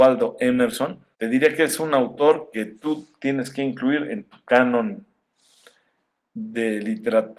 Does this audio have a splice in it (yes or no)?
no